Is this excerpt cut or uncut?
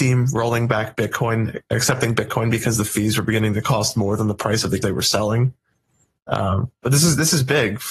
cut